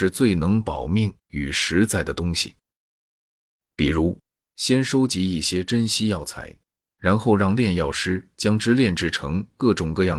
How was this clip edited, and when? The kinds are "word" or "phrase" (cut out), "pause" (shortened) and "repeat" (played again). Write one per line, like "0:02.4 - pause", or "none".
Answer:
none